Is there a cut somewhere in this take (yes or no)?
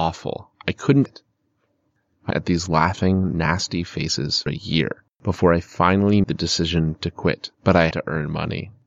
yes